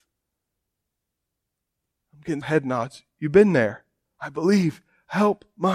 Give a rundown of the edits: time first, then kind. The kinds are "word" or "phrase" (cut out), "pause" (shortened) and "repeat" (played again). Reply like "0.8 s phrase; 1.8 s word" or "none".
2.4 s word